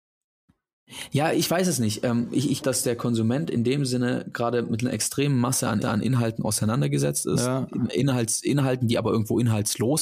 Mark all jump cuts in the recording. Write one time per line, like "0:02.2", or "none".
0:02.6
0:05.8